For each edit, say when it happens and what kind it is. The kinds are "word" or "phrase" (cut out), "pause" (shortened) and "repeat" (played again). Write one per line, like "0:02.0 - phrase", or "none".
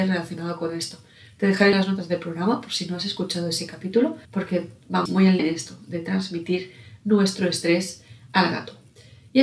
0:01.7 - phrase
0:04.2 - pause
0:05.1 - word
0:05.4 - word